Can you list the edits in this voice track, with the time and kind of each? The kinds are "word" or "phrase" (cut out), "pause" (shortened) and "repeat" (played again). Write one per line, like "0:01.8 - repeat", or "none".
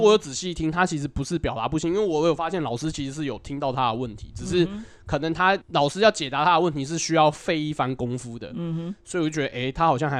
0:05.6 - pause

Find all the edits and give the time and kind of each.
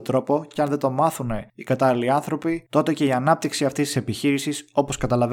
0:01.5 - pause
0:02.7 - pause

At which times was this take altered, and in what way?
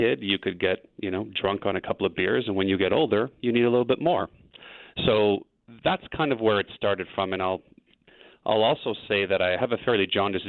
0:05.8 - pause

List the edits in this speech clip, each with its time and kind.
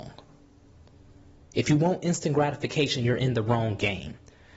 none

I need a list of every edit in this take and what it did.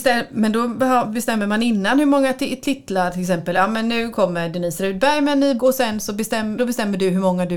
0:05.6 - word
0:06.6 - word

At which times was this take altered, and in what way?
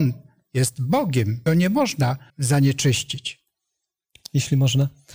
0:01.5 - word
0:02.3 - word

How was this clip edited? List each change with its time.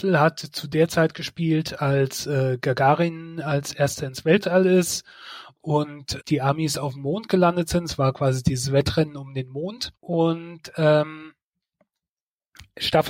0:06.2 - word
0:10.0 - pause

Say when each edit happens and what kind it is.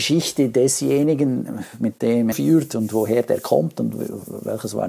0:02.3 - phrase

